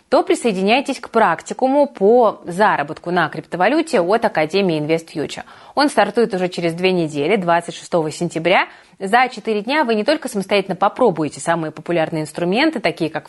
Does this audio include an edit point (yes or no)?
no